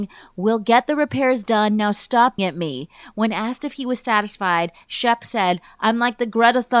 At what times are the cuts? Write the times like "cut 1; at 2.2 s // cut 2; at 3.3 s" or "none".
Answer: cut 1; at 2.4 s